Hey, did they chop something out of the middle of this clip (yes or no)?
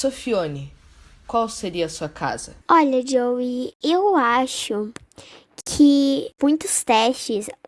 yes